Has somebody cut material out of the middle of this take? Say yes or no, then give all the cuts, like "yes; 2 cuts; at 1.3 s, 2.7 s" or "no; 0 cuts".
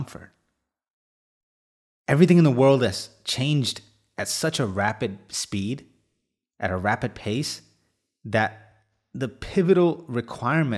no; 0 cuts